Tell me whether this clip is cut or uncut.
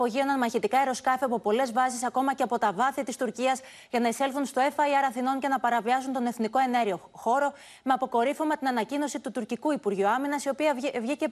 uncut